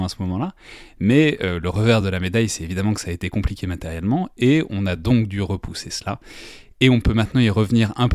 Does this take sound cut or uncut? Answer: uncut